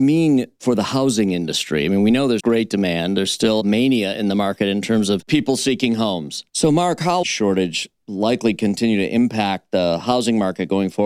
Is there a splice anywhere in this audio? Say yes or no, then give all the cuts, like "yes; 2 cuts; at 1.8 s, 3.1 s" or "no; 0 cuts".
yes; 3 cuts; at 2.4 s, 6.5 s, 7.2 s